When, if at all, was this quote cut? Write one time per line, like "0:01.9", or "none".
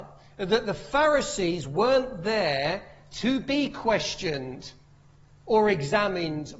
none